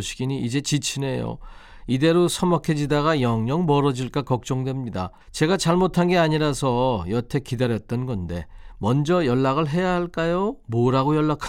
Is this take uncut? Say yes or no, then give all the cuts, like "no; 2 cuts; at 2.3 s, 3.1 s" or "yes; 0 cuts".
no; 1 cut; at 5.2 s